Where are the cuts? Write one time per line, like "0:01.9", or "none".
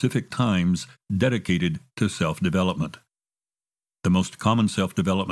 none

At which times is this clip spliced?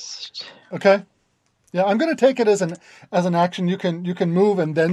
none

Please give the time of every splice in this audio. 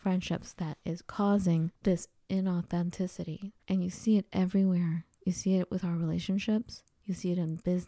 0:03.6

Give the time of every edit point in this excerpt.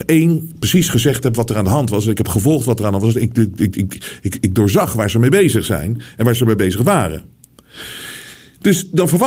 none

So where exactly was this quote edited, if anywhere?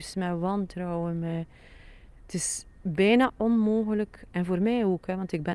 0:02.1

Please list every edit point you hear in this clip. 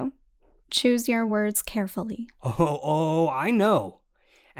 none

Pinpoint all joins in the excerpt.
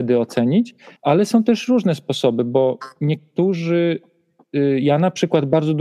0:01.0

